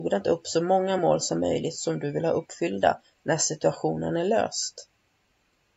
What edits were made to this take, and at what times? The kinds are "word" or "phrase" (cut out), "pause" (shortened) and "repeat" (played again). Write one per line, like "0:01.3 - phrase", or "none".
none

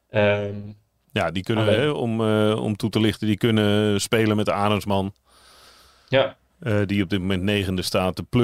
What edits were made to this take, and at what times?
none

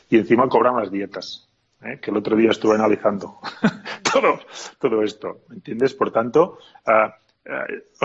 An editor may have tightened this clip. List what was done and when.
none

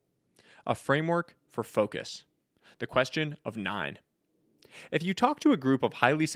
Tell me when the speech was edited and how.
none

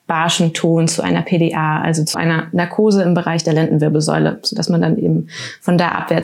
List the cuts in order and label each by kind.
0:02.1 - word

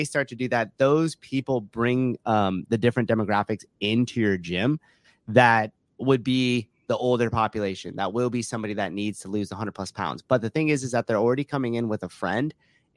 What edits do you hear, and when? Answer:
none

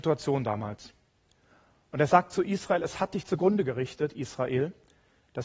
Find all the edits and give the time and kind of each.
none

